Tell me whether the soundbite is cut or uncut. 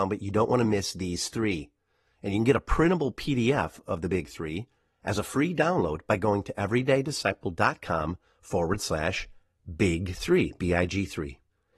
uncut